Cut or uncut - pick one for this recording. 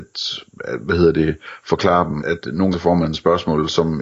cut